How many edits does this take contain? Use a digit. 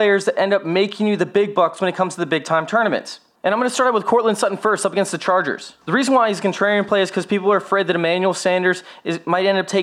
2